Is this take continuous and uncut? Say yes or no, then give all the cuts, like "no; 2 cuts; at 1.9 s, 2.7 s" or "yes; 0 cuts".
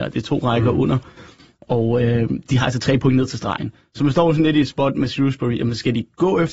yes; 0 cuts